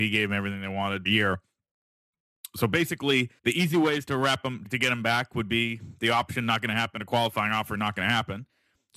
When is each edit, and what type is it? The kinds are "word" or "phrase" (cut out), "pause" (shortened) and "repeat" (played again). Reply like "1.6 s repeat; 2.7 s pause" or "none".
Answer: 1.1 s word; 3.4 s pause; 4.6 s word